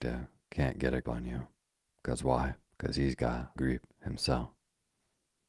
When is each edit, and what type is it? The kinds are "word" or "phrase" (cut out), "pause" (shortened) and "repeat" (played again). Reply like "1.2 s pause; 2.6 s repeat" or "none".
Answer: 1.0 s word; 1.7 s pause; 2.7 s pause; 3.6 s word